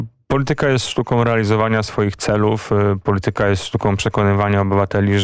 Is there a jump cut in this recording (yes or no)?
no